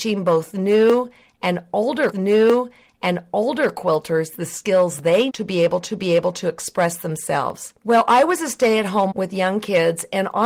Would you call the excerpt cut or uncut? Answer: cut